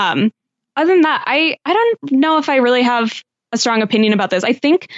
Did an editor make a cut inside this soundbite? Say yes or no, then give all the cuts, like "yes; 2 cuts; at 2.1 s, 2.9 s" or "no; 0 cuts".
no; 0 cuts